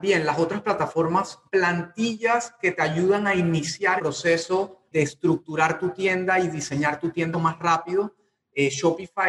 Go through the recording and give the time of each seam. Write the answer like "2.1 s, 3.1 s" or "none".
1.5 s, 4.0 s, 4.9 s, 7.3 s